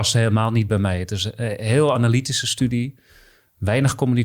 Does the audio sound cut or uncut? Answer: uncut